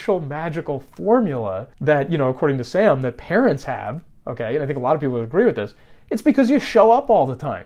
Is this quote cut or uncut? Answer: cut